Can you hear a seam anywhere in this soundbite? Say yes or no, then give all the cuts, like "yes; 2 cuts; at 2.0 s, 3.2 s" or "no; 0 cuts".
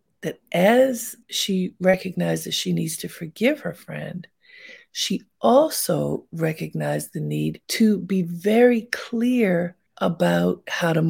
yes; 3 cuts; at 1.2 s, 7.6 s, 9.9 s